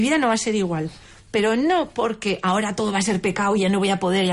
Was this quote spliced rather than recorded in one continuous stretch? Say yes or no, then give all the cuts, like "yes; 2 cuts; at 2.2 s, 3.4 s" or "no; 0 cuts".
no; 0 cuts